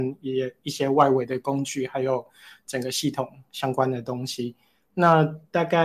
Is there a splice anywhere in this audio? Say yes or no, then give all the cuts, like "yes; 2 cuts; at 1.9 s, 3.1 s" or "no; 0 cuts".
no; 0 cuts